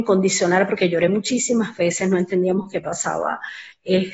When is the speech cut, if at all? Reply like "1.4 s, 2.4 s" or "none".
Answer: none